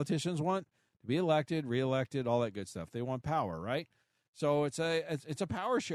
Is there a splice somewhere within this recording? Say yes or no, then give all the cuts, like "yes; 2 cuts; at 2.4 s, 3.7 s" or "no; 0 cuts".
no; 0 cuts